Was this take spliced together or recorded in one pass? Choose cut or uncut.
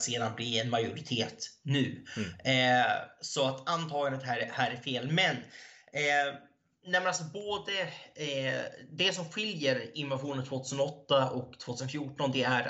uncut